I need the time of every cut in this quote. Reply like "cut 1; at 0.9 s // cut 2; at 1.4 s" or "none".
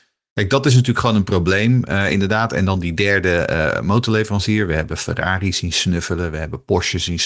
none